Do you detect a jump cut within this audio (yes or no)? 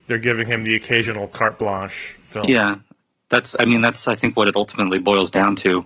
no